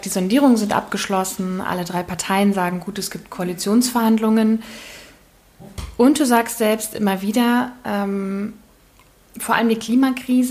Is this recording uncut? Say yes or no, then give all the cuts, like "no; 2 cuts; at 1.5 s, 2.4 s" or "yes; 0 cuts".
yes; 0 cuts